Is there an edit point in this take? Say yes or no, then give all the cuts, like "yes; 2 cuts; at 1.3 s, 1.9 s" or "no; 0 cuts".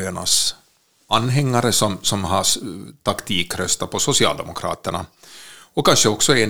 no; 0 cuts